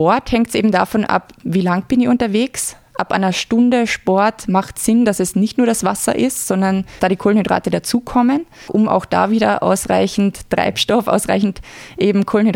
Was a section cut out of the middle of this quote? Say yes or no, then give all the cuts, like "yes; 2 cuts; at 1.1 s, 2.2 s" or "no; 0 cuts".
yes; 2 cuts; at 7.0 s, 8.7 s